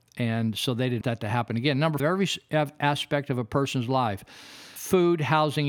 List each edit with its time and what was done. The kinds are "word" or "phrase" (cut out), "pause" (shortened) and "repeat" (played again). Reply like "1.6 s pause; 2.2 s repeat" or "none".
1.0 s word; 2.0 s phrase; 4.8 s word

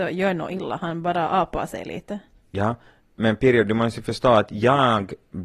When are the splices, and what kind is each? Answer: none

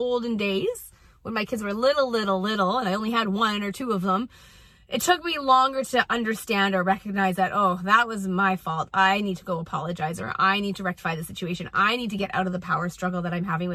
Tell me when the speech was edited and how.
none

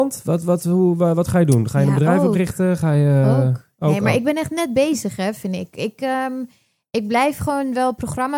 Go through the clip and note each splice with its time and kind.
none

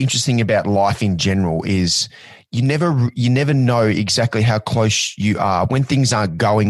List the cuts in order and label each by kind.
none

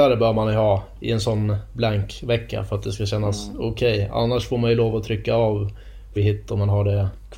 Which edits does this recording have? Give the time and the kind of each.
6.2 s word

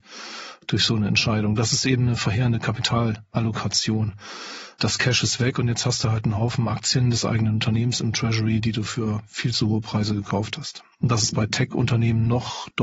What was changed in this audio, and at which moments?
none

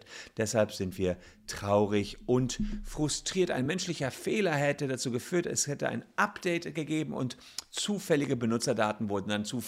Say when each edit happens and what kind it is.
none

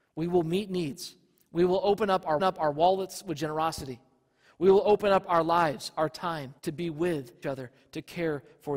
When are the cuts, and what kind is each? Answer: 2.4 s repeat; 6.6 s pause; 7.4 s word

